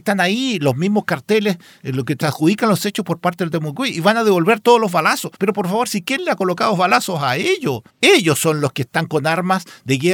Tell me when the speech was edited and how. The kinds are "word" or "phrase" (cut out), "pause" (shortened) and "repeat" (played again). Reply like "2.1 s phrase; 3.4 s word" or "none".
2.2 s phrase; 5.3 s pause; 7.9 s pause

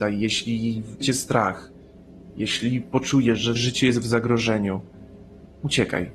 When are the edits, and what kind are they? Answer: 1.0 s word; 3.6 s word

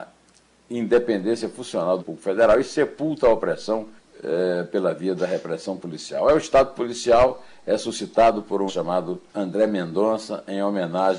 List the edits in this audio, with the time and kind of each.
2.0 s word; 4.0 s pause; 8.7 s word; 9.3 s pause

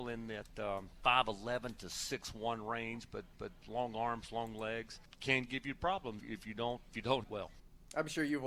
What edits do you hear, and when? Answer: 3.3 s repeat; 6.2 s word; 7.2 s word

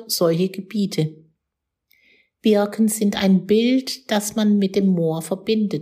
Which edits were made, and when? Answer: none

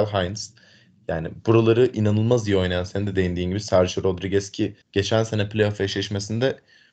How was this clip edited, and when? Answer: 4.8 s pause

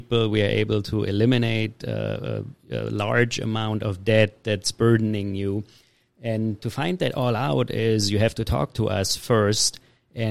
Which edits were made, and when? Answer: 6.6 s word

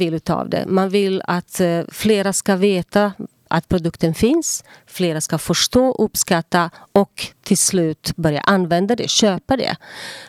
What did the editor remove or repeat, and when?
none

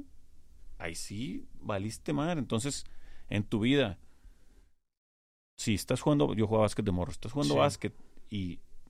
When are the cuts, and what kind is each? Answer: none

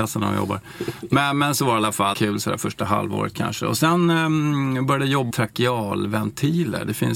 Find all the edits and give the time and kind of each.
2.1 s phrase; 5.3 s phrase

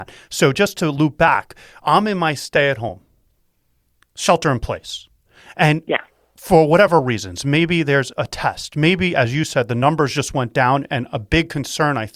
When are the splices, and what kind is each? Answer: none

